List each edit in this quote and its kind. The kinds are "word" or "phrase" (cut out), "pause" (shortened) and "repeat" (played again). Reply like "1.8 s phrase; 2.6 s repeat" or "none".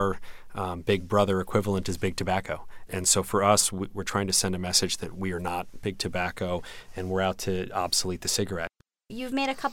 2.9 s word; 3.9 s word